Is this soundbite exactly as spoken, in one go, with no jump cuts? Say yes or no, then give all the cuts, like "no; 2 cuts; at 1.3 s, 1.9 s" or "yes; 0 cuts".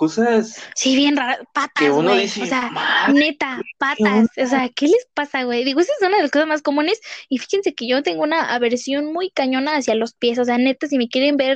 yes; 0 cuts